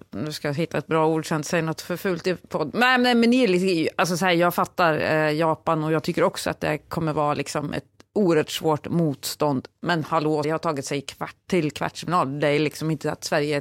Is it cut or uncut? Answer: cut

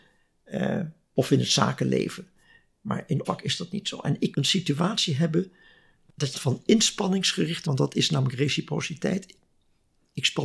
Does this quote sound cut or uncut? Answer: cut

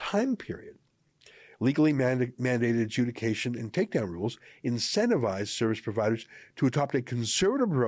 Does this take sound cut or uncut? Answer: uncut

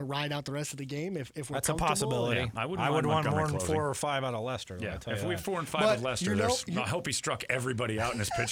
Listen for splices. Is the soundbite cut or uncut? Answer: uncut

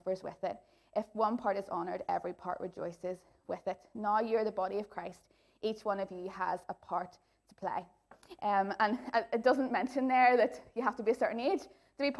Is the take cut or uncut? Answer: uncut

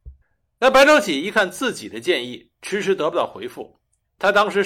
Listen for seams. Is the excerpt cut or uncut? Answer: uncut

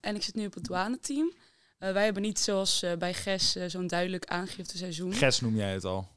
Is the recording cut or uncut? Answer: uncut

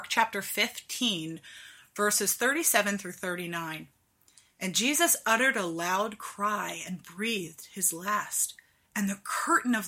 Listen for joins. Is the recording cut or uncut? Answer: uncut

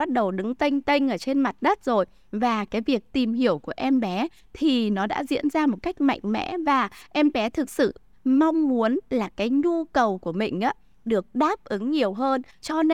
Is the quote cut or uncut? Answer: uncut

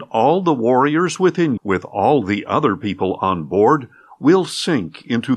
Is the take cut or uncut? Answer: cut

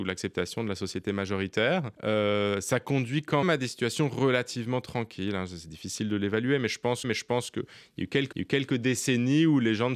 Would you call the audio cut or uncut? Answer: cut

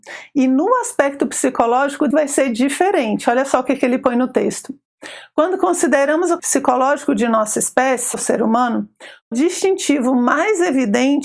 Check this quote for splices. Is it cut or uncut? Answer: cut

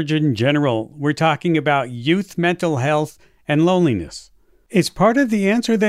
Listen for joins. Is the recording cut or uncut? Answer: uncut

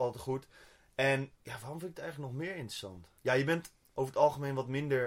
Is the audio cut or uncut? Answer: cut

